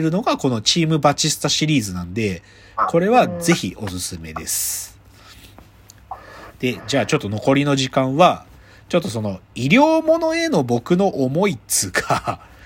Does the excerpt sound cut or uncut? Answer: uncut